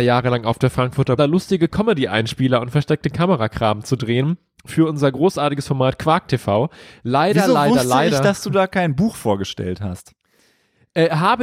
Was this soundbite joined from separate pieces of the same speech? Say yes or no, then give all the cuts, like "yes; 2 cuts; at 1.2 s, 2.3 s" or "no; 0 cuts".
yes; 1 cut; at 1.2 s